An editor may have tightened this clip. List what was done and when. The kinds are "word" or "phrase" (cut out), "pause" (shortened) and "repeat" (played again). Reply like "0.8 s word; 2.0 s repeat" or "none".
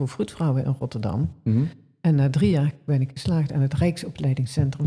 none

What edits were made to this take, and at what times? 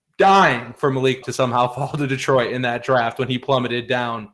1.2 s word

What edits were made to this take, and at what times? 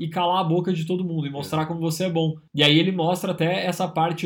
2.5 s pause

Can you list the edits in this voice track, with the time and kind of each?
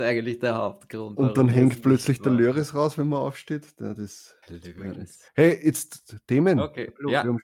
4.4 s pause

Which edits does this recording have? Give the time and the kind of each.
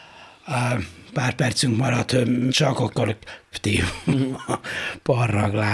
2.5 s word; 3.5 s word

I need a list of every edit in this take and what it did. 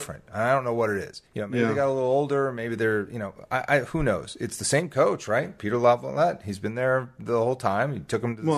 1.3 s pause

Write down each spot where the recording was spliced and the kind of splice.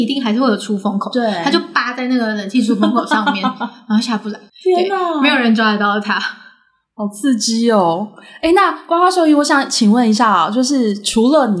4.5 s pause

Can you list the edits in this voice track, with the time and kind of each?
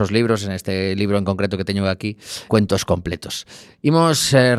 2.5 s word

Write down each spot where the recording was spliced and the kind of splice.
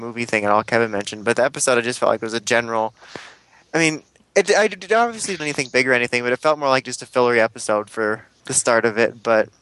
5.4 s word; 8.4 s word

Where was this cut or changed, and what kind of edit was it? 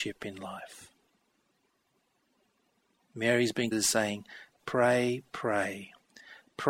3.7 s word; 4.6 s word

